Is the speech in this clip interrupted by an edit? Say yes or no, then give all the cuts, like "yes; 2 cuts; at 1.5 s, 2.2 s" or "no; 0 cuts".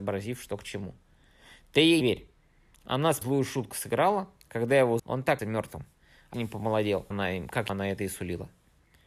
yes; 7 cuts; at 2.0 s, 3.2 s, 5.0 s, 5.4 s, 6.3 s, 7.1 s, 7.7 s